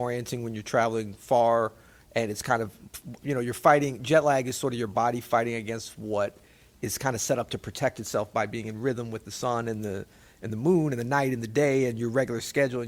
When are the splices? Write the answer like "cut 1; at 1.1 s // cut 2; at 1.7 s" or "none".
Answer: none